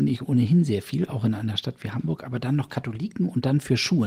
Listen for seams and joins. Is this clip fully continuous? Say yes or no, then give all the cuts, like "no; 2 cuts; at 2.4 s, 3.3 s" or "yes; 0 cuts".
yes; 0 cuts